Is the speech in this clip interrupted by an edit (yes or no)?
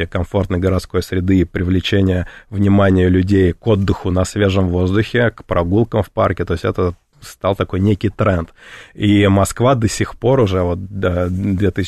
no